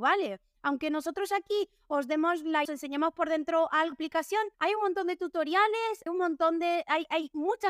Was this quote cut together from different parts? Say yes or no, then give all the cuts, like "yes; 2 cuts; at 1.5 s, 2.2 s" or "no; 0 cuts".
yes; 4 cuts; at 2.6 s, 3.9 s, 4.5 s, 6.1 s